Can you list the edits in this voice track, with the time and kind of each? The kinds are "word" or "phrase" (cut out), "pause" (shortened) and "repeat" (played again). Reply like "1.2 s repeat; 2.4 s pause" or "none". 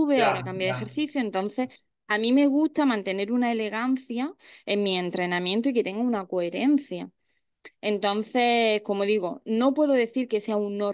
none

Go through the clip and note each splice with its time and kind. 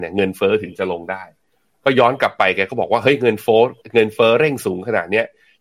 none

